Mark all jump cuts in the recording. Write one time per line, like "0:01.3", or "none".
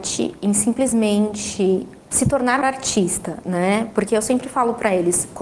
0:02.0
0:02.6